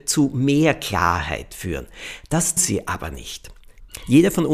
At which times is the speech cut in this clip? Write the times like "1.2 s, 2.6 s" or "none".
2.6 s